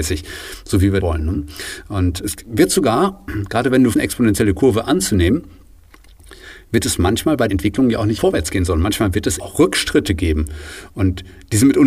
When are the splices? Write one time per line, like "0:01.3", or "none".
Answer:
0:01.0
0:02.2
0:03.9
0:07.5
0:08.2
0:09.4